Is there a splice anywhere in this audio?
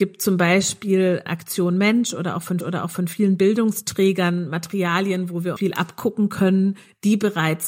yes; 3 cuts; at 1.3 s, 2.6 s, 5.6 s

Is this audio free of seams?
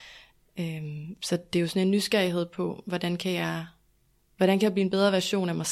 yes; 0 cuts

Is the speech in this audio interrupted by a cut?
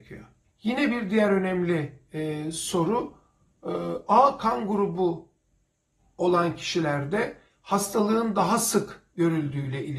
no; 0 cuts

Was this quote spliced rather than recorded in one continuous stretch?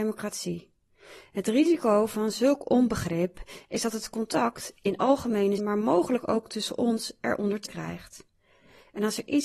yes; 2 cuts; at 5.6 s, 7.7 s

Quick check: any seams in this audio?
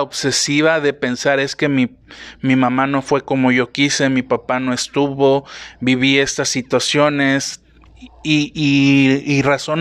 no; 0 cuts

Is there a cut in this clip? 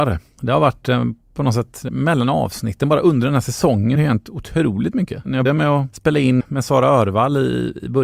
yes; 4 cuts; at 1.9 s, 4.0 s, 5.5 s, 6.4 s

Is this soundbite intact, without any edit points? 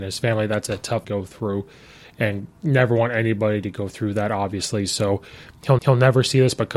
no; 2 cuts; at 1.0 s, 5.8 s

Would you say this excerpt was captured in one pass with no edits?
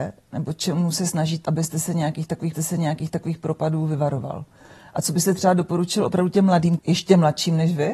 no; 3 cuts; at 1.4 s, 2.5 s, 6.8 s

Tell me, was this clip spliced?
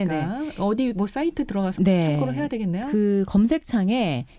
yes; 1 cut; at 1.8 s

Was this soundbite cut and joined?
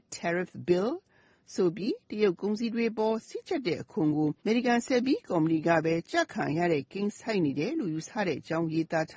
yes; 1 cut; at 4.4 s

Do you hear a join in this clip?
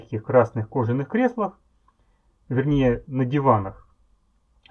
yes; 1 cut; at 3.0 s

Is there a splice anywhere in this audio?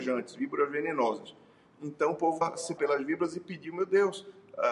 yes; 2 cuts; at 2.4 s, 2.8 s

